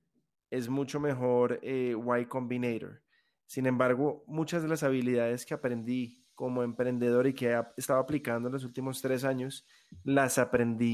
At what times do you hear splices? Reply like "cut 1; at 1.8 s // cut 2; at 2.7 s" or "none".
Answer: cut 1; at 6.3 s